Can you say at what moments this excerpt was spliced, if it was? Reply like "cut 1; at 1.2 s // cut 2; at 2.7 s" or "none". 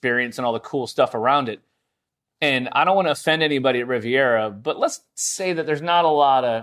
none